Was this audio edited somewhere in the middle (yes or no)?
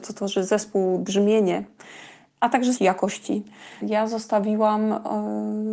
yes